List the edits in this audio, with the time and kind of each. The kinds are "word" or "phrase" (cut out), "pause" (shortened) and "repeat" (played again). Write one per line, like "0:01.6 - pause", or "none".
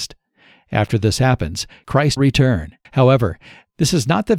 0:02.2 - word
0:02.8 - pause